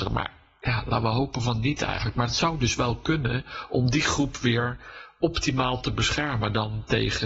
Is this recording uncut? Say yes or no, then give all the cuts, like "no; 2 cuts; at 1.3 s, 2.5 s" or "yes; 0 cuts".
yes; 0 cuts